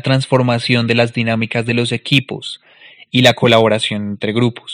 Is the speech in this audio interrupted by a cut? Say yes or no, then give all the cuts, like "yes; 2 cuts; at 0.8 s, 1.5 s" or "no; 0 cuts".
no; 0 cuts